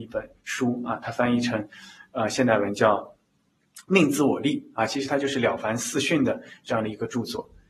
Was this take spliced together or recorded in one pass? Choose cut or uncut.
uncut